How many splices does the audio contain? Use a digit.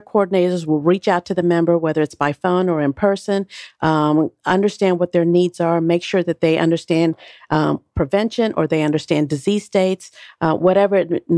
0